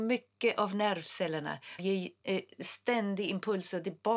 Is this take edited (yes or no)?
yes